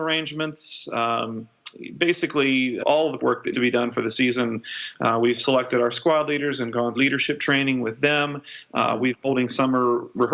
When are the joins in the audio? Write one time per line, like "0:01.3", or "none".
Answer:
0:02.8
0:03.2
0:03.5
0:06.9
0:09.2